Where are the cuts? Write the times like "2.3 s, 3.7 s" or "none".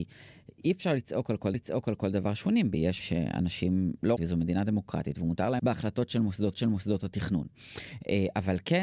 1.5 s, 3.0 s, 4.2 s, 5.6 s, 6.5 s